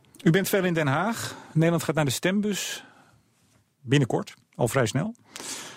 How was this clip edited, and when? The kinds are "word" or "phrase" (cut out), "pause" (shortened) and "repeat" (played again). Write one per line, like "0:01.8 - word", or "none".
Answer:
none